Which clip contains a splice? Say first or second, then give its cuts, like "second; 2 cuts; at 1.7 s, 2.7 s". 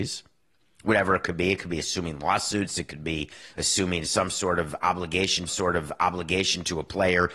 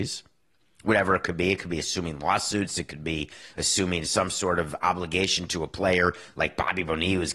first; 1 cut; at 5.5 s